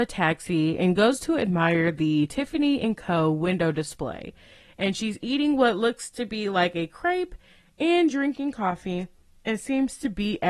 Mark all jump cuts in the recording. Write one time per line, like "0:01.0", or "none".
none